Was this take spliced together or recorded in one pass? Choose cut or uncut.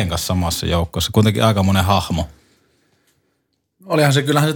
uncut